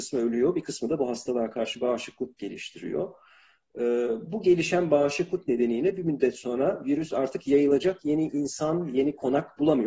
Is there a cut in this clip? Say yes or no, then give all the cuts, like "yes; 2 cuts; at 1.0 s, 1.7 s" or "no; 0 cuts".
no; 0 cuts